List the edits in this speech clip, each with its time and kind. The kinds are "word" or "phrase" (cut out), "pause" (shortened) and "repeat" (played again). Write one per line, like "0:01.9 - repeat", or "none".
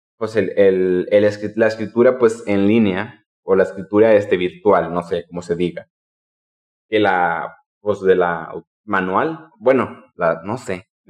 0:08.7 - pause